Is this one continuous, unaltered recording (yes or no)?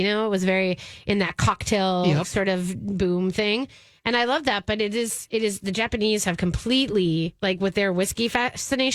yes